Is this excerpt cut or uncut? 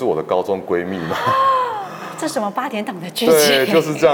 uncut